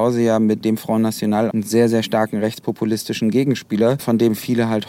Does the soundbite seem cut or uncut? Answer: cut